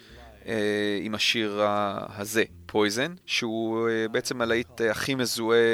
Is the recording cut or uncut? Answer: cut